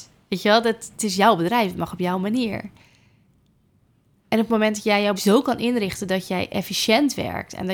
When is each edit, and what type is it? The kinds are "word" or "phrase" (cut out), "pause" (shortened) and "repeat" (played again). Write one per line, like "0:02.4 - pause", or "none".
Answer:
0:05.2 - word